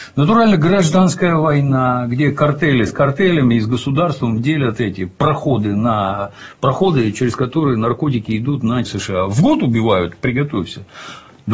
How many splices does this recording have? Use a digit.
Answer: 1